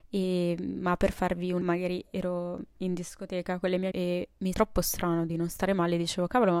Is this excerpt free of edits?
no; 3 cuts; at 1.6 s, 3.9 s, 4.5 s

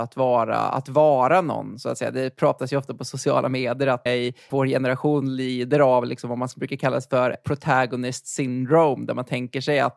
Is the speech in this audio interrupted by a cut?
yes; 4 cuts; at 4.1 s, 4.5 s, 6.5 s, 7.3 s

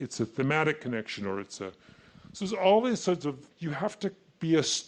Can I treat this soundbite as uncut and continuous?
no; 1 cut; at 3.5 s

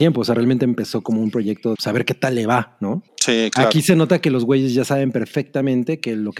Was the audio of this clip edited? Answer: yes; 2 cuts; at 1.8 s, 3.1 s

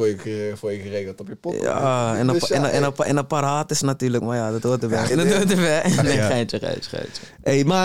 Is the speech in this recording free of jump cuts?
no; 1 cut; at 5.1 s

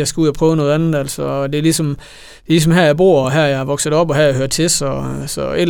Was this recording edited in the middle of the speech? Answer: no; 0 cuts

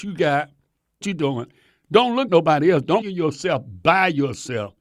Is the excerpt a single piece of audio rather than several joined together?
no; 3 cuts; at 1.0 s, 2.3 s, 3.0 s

